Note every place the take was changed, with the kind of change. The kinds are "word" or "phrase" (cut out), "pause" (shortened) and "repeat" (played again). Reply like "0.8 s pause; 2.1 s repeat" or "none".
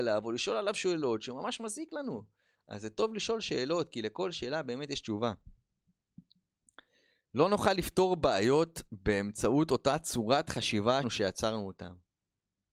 11.0 s word